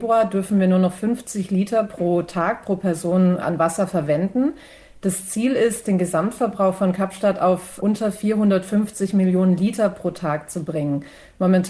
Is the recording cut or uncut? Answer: uncut